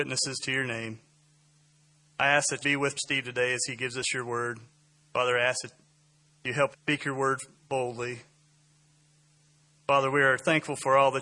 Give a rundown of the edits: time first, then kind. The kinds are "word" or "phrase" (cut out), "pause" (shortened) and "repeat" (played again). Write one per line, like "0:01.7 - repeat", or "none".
0:02.6 - word
0:03.0 - word
0:06.7 - phrase